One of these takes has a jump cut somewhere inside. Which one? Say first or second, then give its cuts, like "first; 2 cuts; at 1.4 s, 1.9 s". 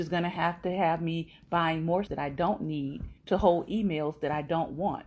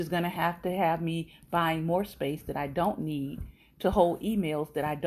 first; 2 cuts; at 2.1 s, 3.2 s